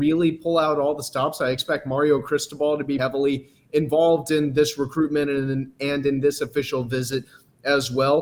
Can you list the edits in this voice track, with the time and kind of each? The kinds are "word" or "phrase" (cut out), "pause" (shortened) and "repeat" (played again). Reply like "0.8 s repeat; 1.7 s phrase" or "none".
3.0 s word

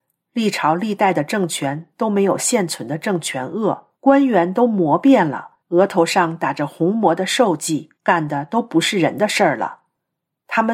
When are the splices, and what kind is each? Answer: 4.0 s pause; 5.6 s pause; 8.0 s pause

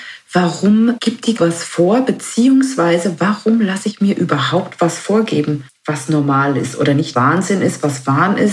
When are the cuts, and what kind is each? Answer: 1.0 s word; 1.4 s phrase; 5.7 s pause; 7.1 s phrase

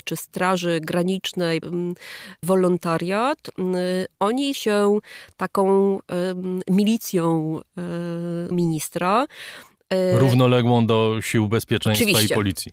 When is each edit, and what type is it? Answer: 1.6 s word; 2.4 s phrase; 4.5 s word; 8.5 s word

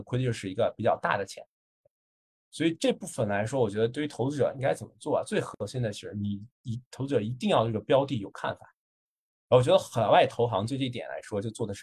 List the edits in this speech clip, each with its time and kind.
6.5 s pause

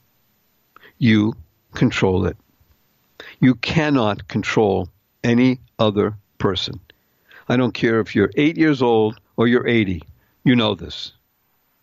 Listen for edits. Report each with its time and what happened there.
none

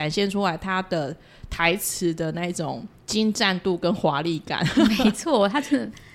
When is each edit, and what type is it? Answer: 3.0 s pause

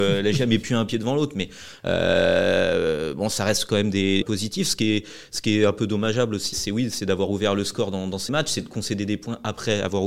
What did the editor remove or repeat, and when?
4.2 s phrase; 6.5 s word; 8.3 s word

